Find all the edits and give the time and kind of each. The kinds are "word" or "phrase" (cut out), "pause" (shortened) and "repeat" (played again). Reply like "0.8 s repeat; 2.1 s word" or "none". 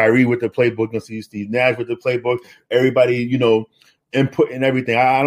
none